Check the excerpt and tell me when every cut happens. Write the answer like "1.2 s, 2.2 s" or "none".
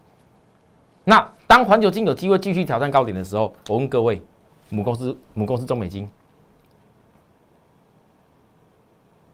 none